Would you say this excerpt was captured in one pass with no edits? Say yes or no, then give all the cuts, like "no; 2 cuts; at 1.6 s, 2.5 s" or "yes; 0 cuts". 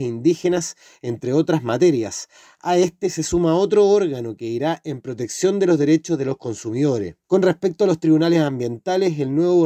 no; 1 cut; at 7.2 s